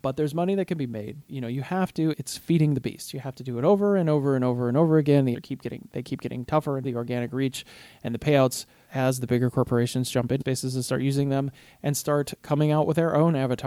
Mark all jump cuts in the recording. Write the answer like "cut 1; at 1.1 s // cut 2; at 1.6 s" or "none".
cut 1; at 1.3 s // cut 2; at 2.1 s // cut 3; at 5.3 s // cut 4; at 6.8 s // cut 5; at 8.9 s // cut 6; at 10.4 s